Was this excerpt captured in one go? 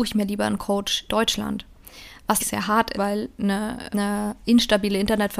no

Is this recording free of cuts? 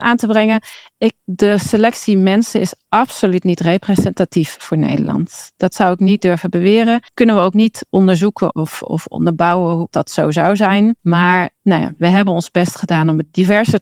no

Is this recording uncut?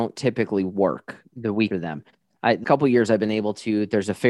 no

